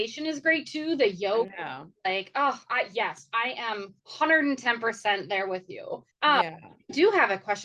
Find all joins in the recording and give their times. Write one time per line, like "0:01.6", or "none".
0:04.0
0:06.1